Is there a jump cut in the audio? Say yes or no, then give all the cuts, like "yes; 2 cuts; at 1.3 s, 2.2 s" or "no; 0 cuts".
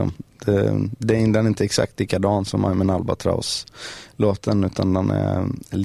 no; 0 cuts